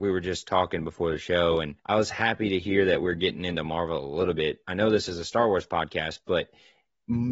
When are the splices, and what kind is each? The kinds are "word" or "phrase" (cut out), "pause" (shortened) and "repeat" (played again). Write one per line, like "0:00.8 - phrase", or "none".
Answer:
0:01.8 - pause